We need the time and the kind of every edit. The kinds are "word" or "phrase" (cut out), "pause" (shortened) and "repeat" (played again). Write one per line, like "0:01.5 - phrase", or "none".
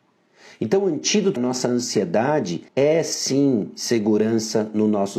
0:01.4 - word
0:02.7 - pause